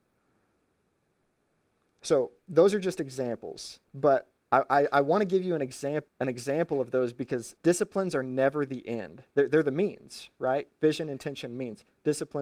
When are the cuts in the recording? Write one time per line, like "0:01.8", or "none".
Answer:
0:03.8
0:06.1
0:07.6

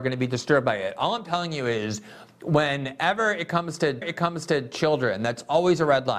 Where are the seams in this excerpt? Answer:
0:04.0

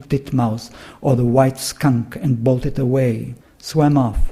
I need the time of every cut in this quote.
0:03.4

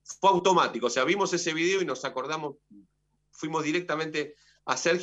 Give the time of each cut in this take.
none

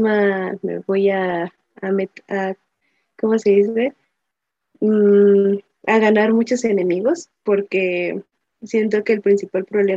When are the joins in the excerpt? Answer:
none

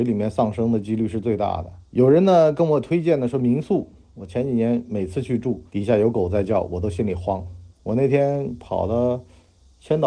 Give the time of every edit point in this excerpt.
0:01.8
0:05.7
0:07.7

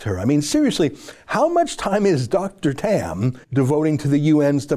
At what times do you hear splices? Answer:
0:03.4

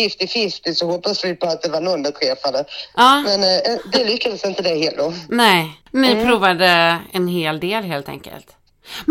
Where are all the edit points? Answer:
0:05.8

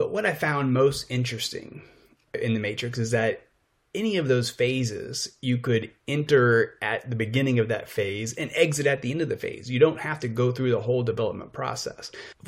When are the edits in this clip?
none

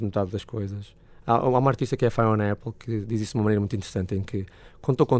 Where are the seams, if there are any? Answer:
0:01.1

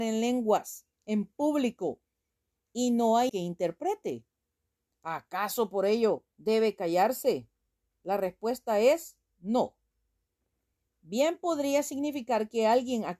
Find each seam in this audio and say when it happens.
0:00.9
0:03.3
0:06.3

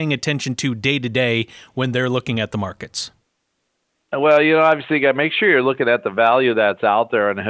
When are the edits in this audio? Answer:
none

